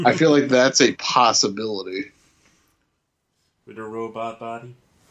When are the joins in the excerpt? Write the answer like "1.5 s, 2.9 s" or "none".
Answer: 3.8 s